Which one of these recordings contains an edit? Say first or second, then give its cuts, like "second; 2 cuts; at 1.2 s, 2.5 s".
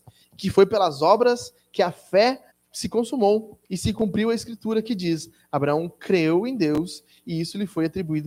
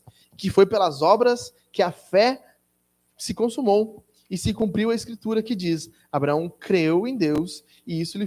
first; 2 cuts; at 2.5 s, 3.6 s